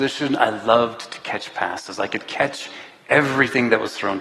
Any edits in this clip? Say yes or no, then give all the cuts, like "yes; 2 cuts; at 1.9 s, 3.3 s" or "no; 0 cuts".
no; 0 cuts